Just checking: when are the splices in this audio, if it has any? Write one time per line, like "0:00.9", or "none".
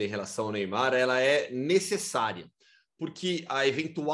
none